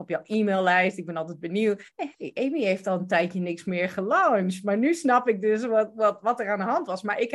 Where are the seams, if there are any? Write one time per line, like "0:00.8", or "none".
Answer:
0:01.9